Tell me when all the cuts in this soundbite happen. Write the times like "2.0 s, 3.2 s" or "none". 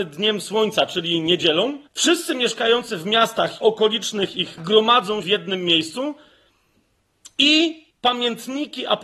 1.9 s, 3.6 s, 4.6 s, 5.2 s, 7.9 s